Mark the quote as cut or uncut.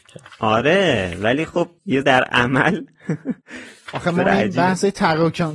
cut